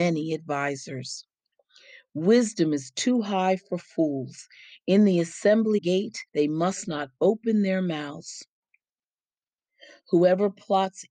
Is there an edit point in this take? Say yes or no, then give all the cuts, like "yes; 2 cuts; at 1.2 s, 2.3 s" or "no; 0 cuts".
yes; 2 cuts; at 5.8 s, 6.3 s